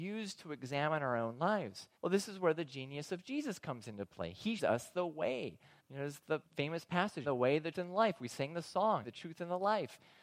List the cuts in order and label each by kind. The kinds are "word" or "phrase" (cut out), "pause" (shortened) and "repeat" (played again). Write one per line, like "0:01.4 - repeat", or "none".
0:02.0 - pause
0:04.6 - word
0:05.8 - pause
0:06.4 - pause
0:07.2 - word
0:07.7 - word
0:09.0 - phrase

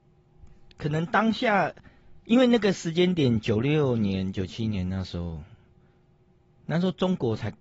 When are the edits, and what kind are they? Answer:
0:02.2 - pause

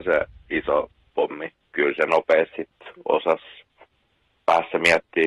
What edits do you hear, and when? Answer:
0:01.7 - phrase
0:02.1 - word

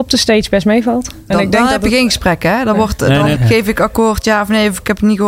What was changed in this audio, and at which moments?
0:01.3 - word
0:03.4 - word

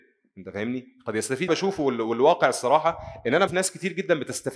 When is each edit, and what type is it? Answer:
0:01.5 - phrase
0:03.5 - word

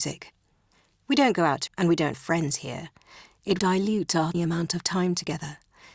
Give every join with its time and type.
0:01.7 - word
0:02.1 - word
0:03.6 - word
0:04.3 - word

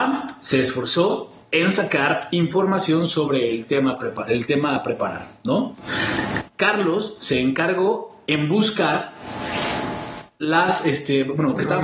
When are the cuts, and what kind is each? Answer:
none

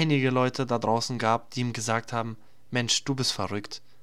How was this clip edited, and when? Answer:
none

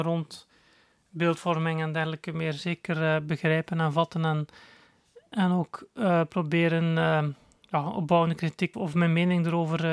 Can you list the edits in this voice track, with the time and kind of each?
0:08.7 - word

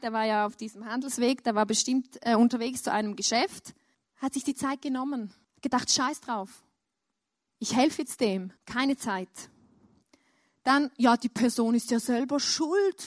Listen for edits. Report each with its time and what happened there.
0:03.9 - pause
0:05.4 - pause
0:08.6 - pause

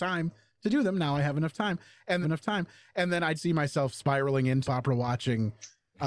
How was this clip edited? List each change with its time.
0:02.2 - repeat
0:03.4 - word
0:04.7 - phrase

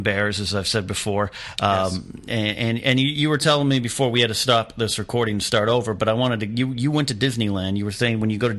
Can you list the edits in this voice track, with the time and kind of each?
none

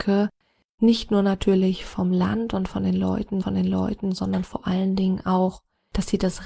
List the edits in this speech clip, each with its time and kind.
0:03.4 - repeat

